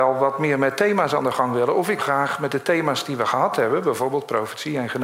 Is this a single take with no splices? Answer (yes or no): no